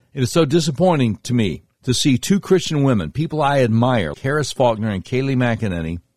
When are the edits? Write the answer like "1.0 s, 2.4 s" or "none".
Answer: 1.7 s, 4.1 s